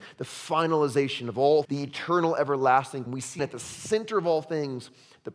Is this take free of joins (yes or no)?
no